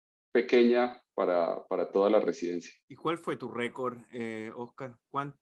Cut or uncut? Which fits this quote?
cut